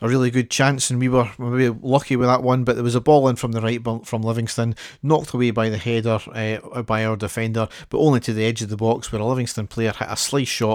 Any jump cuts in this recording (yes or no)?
no